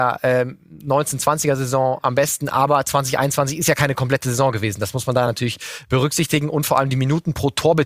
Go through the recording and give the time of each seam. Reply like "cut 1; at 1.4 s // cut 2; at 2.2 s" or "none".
none